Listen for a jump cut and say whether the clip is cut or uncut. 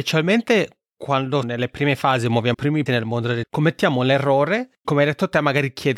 cut